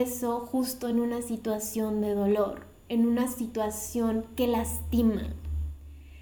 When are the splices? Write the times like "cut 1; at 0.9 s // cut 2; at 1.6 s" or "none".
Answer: none